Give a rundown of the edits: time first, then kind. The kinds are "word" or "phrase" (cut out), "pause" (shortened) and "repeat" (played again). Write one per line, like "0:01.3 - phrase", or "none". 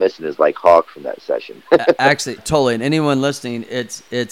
0:02.4 - word